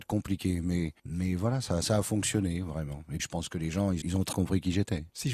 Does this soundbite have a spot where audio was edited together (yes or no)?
yes